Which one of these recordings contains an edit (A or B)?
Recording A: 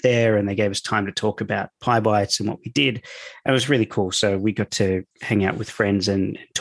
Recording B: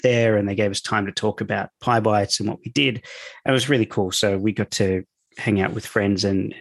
A